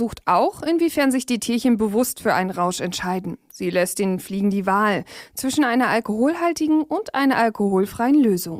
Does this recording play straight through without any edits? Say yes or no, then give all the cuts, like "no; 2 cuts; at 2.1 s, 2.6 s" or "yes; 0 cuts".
yes; 0 cuts